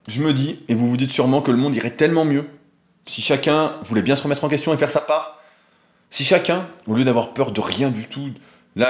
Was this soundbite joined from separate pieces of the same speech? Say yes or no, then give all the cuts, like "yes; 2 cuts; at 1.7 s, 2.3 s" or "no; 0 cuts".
no; 0 cuts